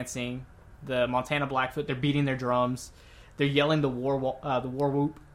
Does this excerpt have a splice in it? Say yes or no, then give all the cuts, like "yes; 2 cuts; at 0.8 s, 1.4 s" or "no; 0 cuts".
no; 0 cuts